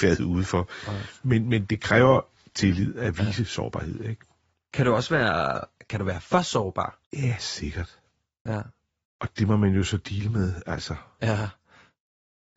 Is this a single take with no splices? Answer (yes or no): yes